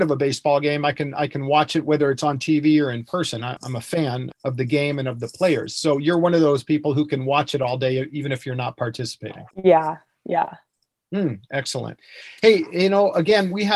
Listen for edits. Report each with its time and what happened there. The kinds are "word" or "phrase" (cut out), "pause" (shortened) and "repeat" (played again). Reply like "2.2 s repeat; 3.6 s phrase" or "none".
3.6 s word; 4.3 s word; 9.5 s pause